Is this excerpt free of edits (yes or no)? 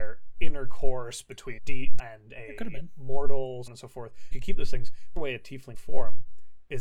no